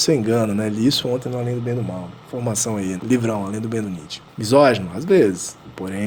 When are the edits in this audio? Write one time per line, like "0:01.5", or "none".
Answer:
0:02.2
0:03.0
0:03.8
0:04.3